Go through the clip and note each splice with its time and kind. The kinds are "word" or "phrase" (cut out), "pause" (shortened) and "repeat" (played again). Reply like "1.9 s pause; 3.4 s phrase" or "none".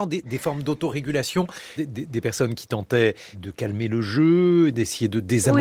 1.8 s word; 3.3 s word

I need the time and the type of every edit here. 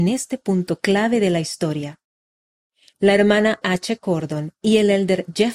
3.6 s word

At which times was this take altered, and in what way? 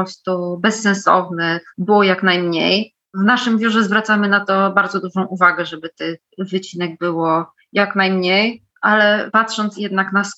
none

